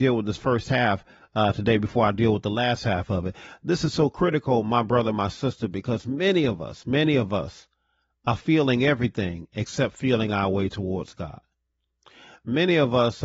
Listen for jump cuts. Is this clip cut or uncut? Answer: uncut